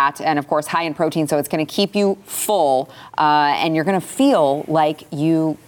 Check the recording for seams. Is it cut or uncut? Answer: uncut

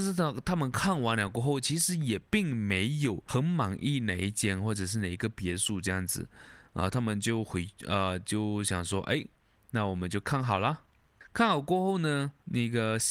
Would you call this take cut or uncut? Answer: uncut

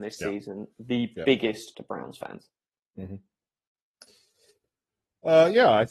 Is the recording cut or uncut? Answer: cut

